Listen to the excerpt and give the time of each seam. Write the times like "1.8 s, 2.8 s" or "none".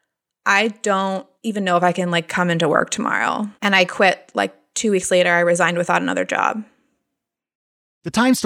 1.4 s, 3.5 s